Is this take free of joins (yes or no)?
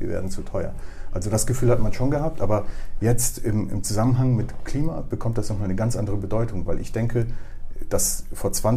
yes